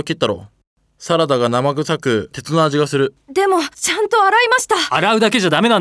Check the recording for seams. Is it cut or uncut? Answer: cut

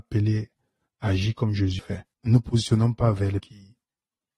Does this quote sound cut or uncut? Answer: cut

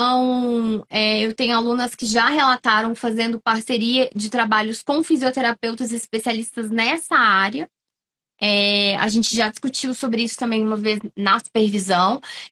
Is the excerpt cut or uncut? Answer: uncut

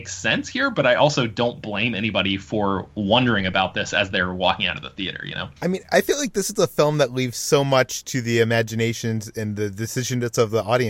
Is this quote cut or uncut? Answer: cut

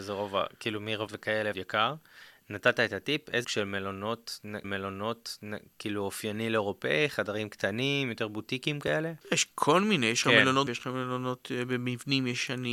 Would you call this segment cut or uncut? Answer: cut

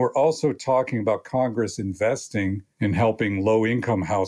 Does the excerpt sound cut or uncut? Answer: uncut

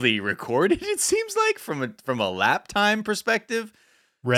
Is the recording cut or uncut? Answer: uncut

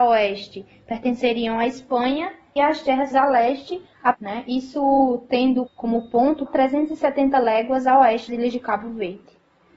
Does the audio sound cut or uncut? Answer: cut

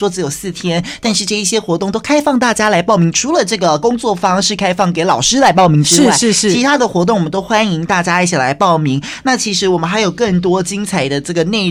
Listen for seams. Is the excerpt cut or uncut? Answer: uncut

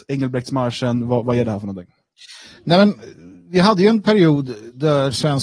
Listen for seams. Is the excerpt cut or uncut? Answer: uncut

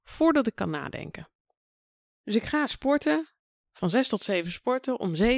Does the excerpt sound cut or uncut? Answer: uncut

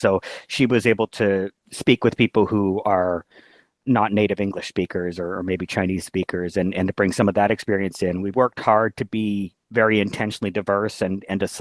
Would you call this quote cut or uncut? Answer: cut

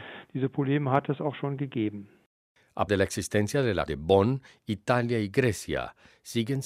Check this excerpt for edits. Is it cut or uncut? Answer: cut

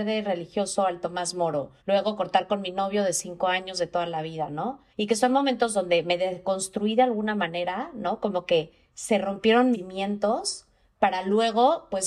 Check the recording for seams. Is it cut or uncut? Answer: cut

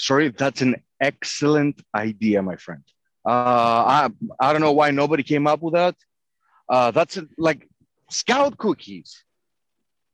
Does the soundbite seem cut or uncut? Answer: uncut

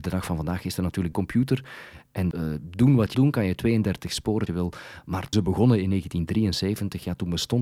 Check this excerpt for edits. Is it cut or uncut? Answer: cut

